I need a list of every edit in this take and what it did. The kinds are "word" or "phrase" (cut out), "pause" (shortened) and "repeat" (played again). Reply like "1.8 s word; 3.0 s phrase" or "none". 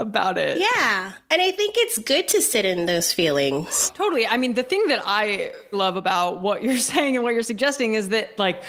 5.7 s word